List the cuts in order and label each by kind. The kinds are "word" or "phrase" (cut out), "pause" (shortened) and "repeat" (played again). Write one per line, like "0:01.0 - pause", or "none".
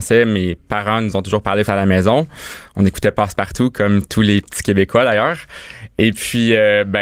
0:01.7 - word